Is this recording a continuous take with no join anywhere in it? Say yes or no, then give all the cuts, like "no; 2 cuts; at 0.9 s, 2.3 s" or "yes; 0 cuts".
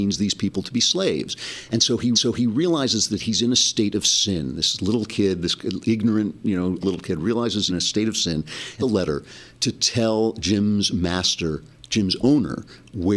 no; 4 cuts; at 2.1 s, 6.8 s, 7.7 s, 8.8 s